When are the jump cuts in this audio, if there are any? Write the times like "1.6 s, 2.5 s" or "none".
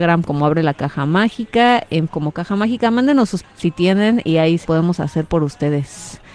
2.1 s, 3.4 s, 4.6 s